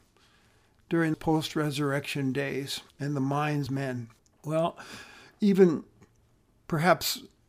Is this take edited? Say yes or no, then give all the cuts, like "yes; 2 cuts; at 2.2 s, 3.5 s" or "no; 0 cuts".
yes; 4 cuts; at 1.1 s, 2.9 s, 3.7 s, 4.2 s